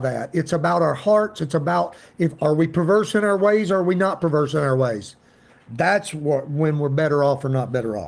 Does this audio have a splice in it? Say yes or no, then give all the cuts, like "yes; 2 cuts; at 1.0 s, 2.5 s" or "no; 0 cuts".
no; 0 cuts